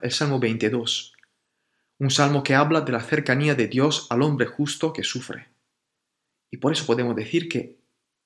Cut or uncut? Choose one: uncut